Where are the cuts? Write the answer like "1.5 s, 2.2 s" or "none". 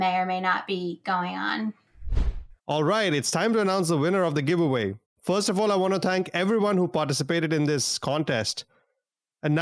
2.6 s, 5.1 s